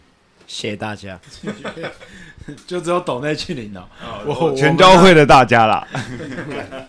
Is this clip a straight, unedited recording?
no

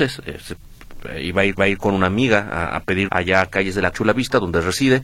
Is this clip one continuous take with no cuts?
no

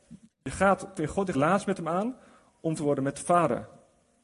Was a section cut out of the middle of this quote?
yes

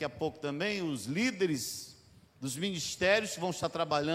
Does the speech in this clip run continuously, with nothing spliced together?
yes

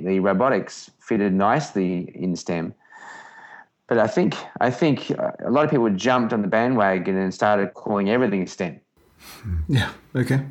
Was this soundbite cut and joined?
no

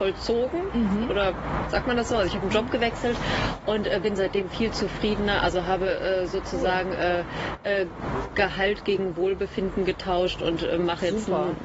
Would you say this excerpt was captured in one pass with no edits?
yes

